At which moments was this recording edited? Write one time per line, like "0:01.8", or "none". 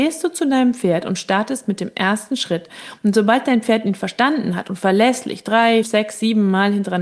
0:05.8